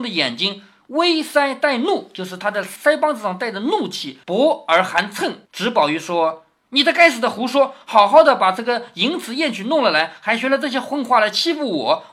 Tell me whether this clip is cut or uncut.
cut